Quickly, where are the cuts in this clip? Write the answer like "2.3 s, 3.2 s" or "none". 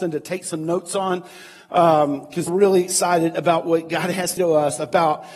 2.5 s, 4.4 s